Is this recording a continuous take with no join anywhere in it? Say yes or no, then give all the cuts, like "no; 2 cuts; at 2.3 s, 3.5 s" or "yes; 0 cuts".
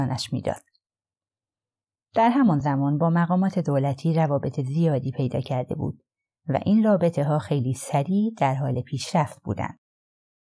yes; 0 cuts